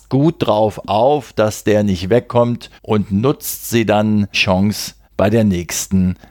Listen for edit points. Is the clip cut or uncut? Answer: cut